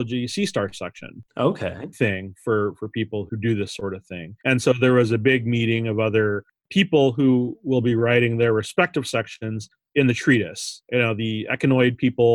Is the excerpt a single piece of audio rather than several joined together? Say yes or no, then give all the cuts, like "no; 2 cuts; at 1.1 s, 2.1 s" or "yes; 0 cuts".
no; 4 cuts; at 1.9 s, 3.3 s, 4.4 s, 10.8 s